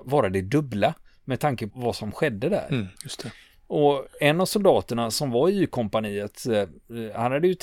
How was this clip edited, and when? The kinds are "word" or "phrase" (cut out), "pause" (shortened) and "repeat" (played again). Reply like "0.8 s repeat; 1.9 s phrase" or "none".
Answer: 1.7 s word; 3.0 s pause